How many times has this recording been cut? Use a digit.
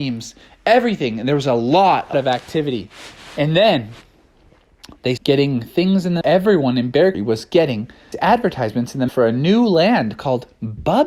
6